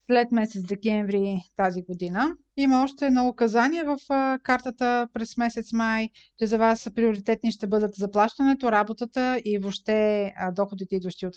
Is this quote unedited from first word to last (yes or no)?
yes